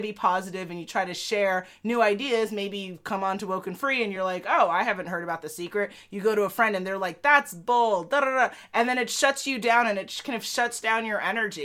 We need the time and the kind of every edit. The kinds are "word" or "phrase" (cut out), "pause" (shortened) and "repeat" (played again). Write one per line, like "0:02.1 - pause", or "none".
none